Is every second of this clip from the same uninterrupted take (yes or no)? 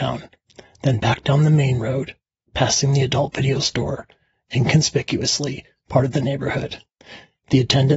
yes